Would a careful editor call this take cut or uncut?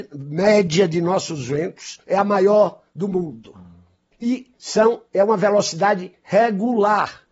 cut